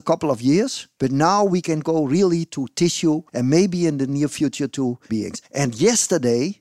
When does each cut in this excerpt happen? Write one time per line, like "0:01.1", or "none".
0:03.3
0:05.1
0:05.4